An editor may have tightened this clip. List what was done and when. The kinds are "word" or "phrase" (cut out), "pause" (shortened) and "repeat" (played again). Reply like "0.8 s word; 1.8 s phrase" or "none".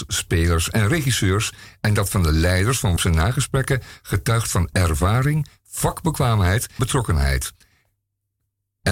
3.0 s word; 6.8 s word